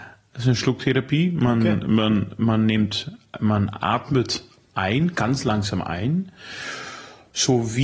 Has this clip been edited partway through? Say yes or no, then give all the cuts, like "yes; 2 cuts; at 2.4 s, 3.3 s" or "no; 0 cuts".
no; 0 cuts